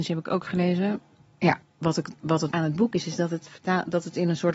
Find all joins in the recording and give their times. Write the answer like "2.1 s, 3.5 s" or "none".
1.6 s, 2.5 s